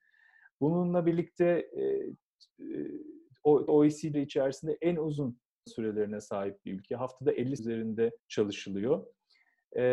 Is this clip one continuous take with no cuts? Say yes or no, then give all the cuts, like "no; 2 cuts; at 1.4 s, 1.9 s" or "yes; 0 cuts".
no; 5 cuts; at 3.7 s, 4.1 s, 5.7 s, 7.6 s, 8.2 s